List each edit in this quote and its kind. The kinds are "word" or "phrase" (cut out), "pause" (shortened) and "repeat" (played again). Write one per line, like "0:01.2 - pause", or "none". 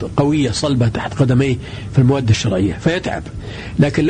none